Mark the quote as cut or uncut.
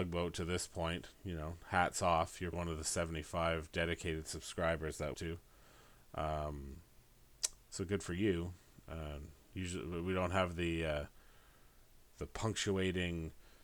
cut